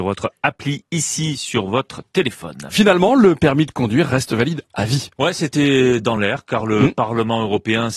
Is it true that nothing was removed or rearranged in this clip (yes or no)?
yes